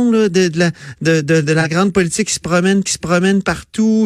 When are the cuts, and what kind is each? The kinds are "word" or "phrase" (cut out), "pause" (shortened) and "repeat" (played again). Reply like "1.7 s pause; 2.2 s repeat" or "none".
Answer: 2.9 s repeat

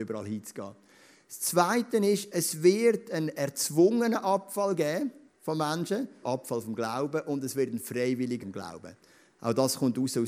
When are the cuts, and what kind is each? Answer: 5.3 s pause; 6.2 s word; 8.4 s phrase

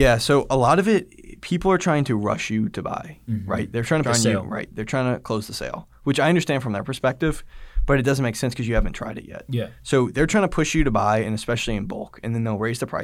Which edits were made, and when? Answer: 4.0 s phrase

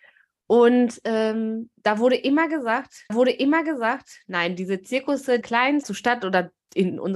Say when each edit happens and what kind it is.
3.1 s repeat; 5.4 s word; 5.8 s phrase

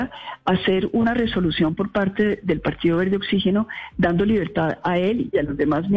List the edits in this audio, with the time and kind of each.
none

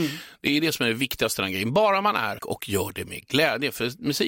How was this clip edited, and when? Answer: 2.4 s phrase

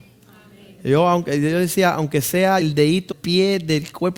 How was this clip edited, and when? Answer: 2.6 s word; 3.1 s word

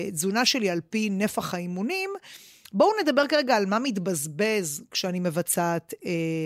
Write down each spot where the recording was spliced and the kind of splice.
none

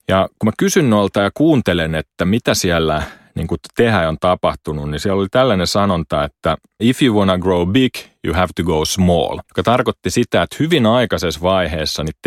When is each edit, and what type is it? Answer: 6.8 s word; 9.4 s pause

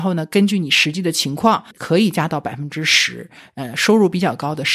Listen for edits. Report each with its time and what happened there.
1.7 s pause

